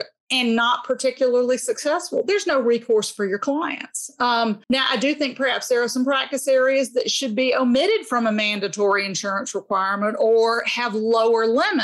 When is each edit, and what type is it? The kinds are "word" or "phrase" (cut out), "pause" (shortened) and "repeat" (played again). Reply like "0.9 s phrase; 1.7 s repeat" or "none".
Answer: 4.6 s pause